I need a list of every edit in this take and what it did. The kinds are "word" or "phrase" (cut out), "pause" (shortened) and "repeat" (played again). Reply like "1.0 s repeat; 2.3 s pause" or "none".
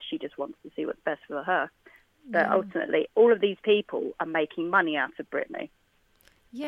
none